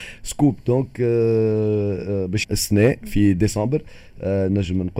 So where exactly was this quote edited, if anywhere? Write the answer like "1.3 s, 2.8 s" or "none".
2.4 s